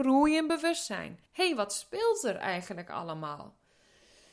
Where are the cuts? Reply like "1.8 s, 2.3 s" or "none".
1.3 s

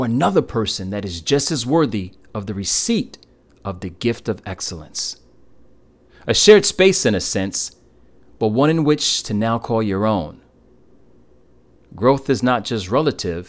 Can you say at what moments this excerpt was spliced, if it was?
none

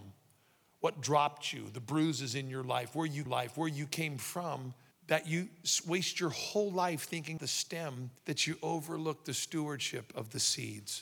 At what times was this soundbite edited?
3.3 s, 4.9 s, 7.4 s, 8.2 s

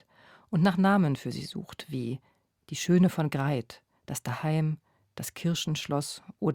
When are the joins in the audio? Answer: none

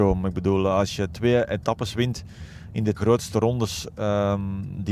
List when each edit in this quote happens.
3.0 s

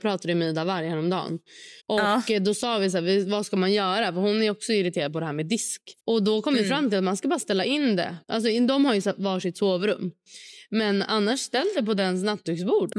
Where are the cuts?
1.8 s, 6.0 s, 8.2 s

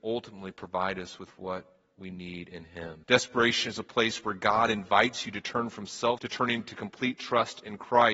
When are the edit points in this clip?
3.0 s, 6.2 s

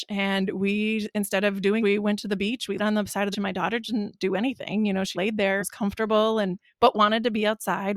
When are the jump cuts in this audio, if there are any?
1.8 s, 2.8 s, 3.3 s, 5.1 s, 5.6 s

